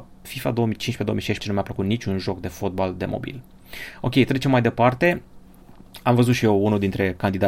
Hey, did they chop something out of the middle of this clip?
yes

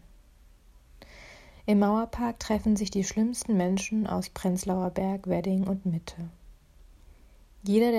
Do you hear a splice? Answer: no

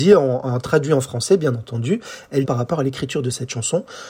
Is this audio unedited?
no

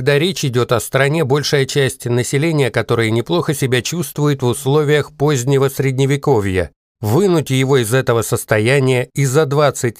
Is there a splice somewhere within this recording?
no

